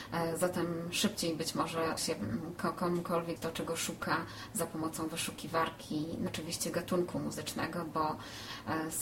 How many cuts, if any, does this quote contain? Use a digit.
3